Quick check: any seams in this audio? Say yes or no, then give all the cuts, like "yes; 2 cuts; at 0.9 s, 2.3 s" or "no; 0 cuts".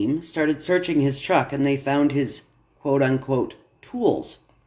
no; 0 cuts